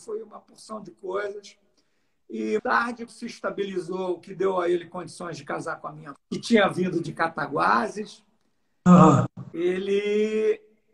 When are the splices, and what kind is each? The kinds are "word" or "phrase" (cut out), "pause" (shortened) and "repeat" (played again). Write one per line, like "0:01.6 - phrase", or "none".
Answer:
0:02.6 - word
0:03.1 - word
0:06.1 - word
0:07.1 - word